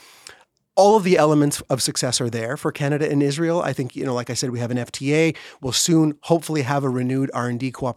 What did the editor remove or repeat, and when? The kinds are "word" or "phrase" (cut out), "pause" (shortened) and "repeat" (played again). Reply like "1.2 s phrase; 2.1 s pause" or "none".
none